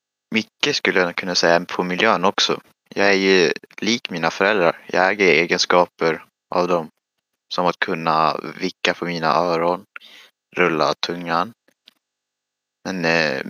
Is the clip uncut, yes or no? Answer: yes